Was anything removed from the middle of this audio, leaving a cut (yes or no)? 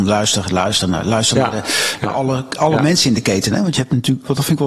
no